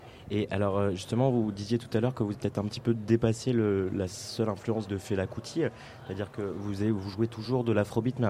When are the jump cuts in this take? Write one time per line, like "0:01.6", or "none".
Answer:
0:02.3
0:04.9